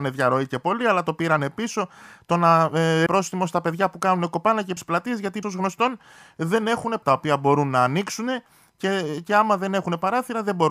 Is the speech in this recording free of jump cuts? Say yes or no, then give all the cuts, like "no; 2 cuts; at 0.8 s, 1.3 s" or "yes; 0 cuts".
no; 4 cuts; at 3.1 s, 4.8 s, 5.4 s, 7.0 s